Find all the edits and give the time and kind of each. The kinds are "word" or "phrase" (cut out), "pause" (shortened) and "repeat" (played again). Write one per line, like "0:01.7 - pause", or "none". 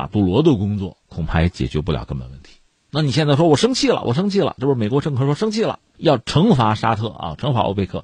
0:01.0 - pause
0:05.9 - pause

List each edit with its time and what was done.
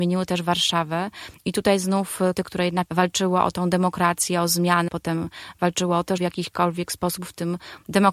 0:02.3 - word
0:02.9 - word
0:04.9 - word
0:06.2 - word

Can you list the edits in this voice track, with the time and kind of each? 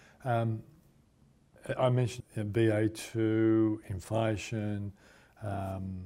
0:02.2 - word

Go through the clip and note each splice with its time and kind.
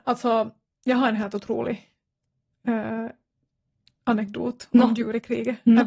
none

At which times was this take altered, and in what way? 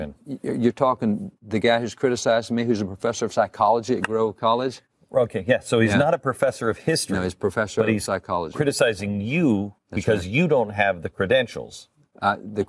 none

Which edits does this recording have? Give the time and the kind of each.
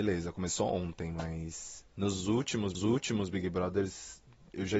0:01.9 - pause
0:02.7 - repeat

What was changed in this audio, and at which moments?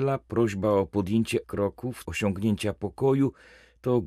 0:01.4 - word
0:02.0 - word

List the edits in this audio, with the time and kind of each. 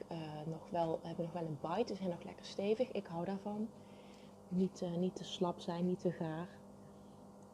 none

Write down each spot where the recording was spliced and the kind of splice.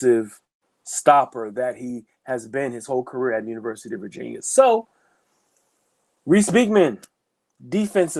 none

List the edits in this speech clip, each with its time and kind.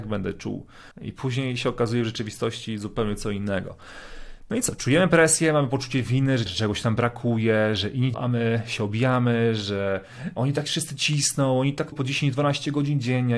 0:00.9 - pause
0:06.5 - phrase
0:08.1 - word
0:11.9 - word

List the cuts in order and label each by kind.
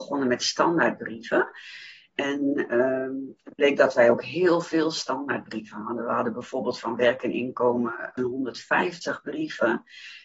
0:08.2 - phrase

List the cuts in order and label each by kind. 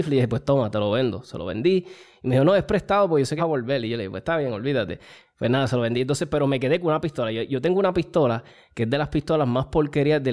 0:03.4 - word

